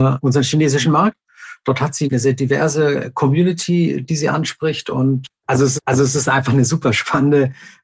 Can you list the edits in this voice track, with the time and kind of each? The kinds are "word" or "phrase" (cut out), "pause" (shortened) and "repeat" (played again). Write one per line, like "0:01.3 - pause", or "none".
0:05.8 - repeat